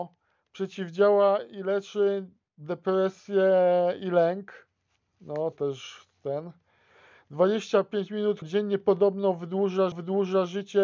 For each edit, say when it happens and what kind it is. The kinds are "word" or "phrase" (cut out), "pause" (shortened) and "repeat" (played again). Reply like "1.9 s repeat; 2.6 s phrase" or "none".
5.5 s word; 8.4 s word; 9.9 s repeat